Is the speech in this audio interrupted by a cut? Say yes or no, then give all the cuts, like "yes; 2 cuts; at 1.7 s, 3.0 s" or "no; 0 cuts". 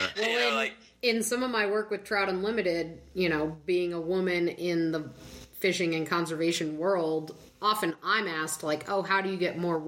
no; 0 cuts